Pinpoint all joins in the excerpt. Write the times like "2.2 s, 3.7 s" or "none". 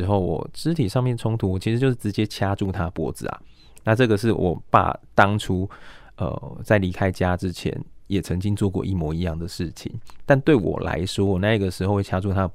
none